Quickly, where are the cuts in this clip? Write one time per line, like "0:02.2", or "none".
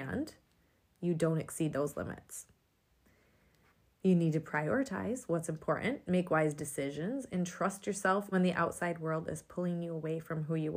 0:08.3